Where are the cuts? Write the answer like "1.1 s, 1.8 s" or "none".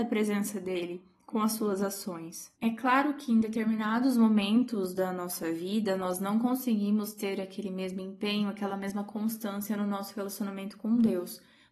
none